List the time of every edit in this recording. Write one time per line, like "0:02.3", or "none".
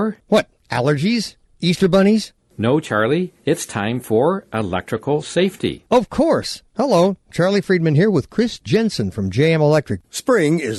none